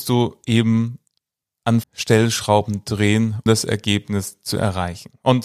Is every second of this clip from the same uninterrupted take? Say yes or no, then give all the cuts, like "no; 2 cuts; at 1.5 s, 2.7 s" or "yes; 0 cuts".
no; 2 cuts; at 1.8 s, 3.5 s